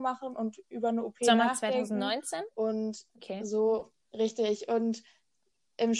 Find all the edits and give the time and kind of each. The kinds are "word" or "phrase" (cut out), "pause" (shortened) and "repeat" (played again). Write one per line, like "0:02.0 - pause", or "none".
0:03.1 - pause
0:04.0 - pause